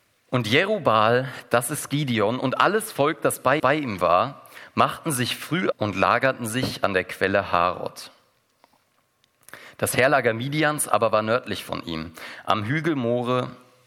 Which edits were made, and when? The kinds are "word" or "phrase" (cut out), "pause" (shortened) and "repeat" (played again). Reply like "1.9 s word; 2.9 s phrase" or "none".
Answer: 3.6 s repeat; 5.7 s word